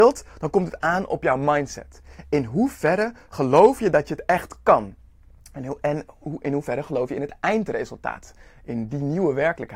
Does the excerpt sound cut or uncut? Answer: uncut